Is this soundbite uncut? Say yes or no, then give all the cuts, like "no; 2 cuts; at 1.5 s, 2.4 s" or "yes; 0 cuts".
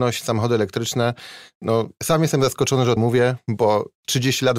no; 1 cut; at 3.0 s